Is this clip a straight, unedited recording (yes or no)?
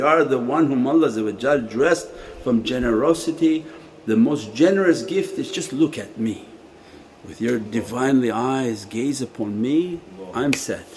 yes